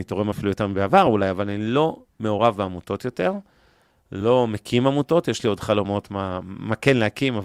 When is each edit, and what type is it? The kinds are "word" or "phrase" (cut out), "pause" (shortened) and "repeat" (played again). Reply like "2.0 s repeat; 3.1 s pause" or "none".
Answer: none